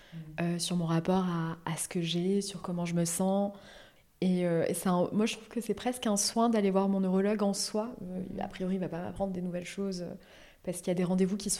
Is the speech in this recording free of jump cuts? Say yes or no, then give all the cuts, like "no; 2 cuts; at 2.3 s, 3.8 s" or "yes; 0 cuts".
yes; 0 cuts